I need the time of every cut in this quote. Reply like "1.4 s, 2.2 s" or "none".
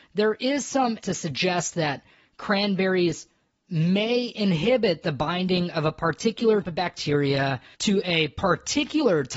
1.0 s, 6.6 s